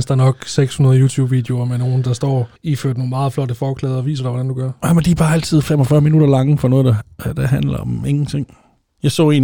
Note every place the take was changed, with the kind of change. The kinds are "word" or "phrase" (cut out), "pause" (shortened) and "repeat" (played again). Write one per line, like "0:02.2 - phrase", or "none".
0:02.6 - pause